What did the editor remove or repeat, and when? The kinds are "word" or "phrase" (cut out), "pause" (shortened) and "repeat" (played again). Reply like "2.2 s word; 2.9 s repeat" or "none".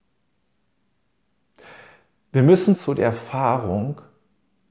2.8 s word